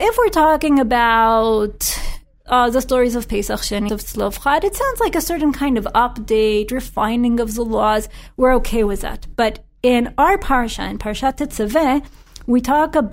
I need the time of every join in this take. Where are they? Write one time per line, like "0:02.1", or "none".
0:03.9